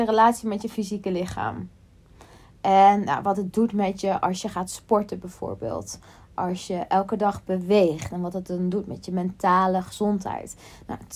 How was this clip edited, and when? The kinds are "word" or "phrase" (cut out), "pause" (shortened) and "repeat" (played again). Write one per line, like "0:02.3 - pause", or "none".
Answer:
none